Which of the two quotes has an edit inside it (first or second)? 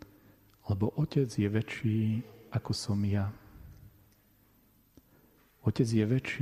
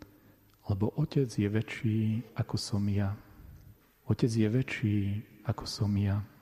second